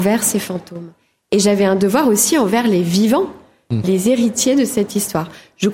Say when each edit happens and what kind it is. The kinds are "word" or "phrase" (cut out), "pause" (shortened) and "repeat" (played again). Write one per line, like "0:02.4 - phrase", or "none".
0:03.8 - word